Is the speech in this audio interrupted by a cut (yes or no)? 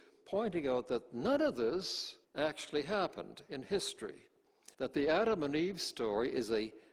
yes